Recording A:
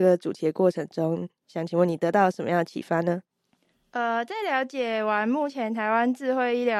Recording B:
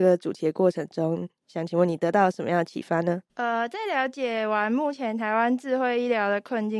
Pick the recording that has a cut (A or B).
B